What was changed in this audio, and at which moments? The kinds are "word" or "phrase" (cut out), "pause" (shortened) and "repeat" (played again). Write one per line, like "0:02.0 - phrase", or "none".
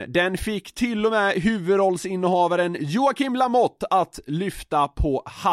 none